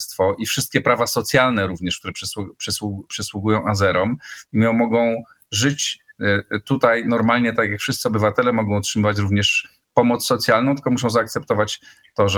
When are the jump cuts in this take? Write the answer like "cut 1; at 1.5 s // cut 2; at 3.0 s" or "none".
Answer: none